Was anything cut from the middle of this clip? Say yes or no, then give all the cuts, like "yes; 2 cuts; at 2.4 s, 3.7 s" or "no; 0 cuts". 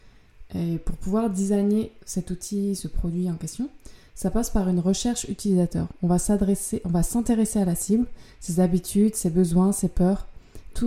no; 0 cuts